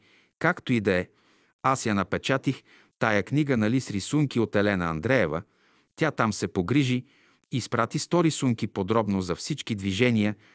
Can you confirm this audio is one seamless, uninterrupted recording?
yes; 0 cuts

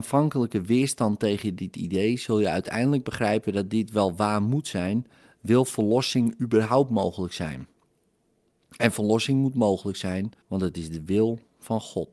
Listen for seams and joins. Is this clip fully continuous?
no; 1 cut; at 10.4 s

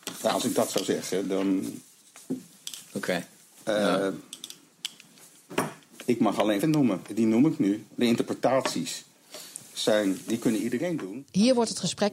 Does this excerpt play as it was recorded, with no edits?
no; 3 cuts; at 2.2 s, 5.9 s, 6.6 s

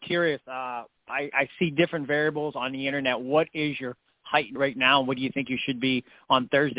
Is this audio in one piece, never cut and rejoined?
no; 1 cut; at 4.6 s

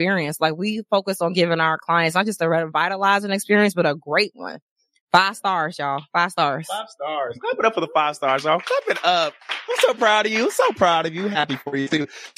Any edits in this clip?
no; 0 cuts

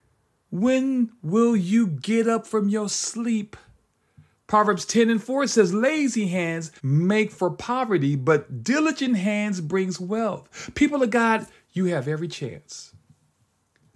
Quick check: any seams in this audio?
yes; 1 cut; at 6.8 s

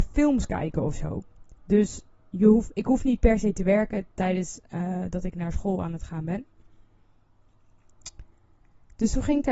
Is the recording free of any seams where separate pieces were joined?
yes; 0 cuts

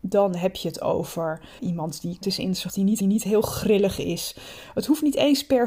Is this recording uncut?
no; 4 cuts; at 1.6 s, 2.2 s, 2.7 s, 3.0 s

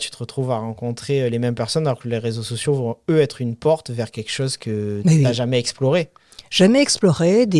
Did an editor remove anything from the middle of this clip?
no; 0 cuts

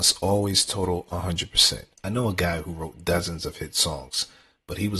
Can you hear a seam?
yes; 1 cut; at 1.9 s

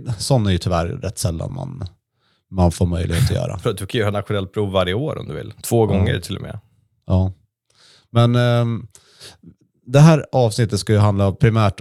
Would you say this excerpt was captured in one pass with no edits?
yes; 0 cuts

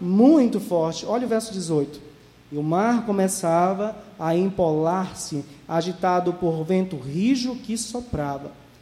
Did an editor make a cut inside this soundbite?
no; 0 cuts

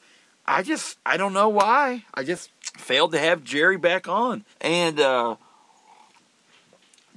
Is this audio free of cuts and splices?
no; 3 cuts; at 1.0 s, 2.6 s, 4.5 s

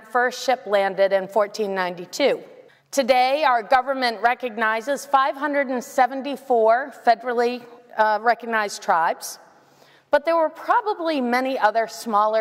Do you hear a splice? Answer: yes; 1 cut; at 2.7 s

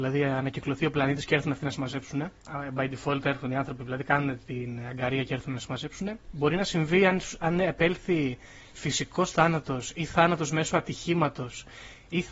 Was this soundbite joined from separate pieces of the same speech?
yes; 1 cut; at 2.4 s

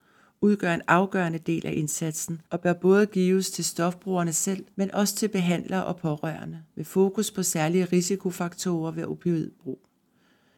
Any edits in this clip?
yes; 3 cuts; at 2.4 s, 4.7 s, 6.7 s

